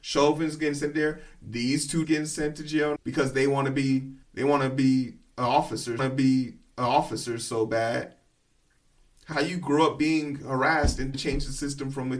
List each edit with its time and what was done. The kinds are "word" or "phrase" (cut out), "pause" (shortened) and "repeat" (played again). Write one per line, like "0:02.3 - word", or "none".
0:02.0 - word
0:03.0 - word
0:04.2 - pause
0:06.0 - repeat
0:09.3 - word
0:11.1 - phrase